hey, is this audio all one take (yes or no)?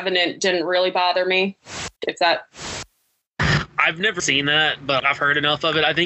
no